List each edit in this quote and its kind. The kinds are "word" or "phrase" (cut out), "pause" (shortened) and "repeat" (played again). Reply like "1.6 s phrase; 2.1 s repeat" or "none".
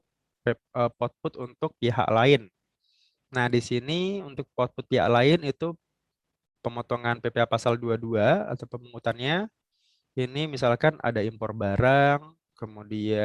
none